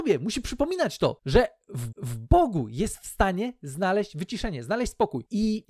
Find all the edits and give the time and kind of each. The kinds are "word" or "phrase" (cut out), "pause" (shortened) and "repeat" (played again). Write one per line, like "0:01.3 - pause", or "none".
0:01.9 - repeat